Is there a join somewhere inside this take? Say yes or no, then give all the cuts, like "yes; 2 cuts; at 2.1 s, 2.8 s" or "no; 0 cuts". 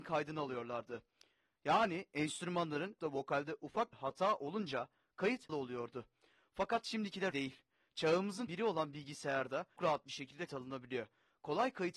yes; 7 cuts; at 3.0 s, 3.9 s, 5.5 s, 7.3 s, 8.5 s, 9.8 s, 10.5 s